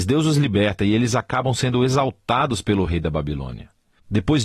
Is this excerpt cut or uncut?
uncut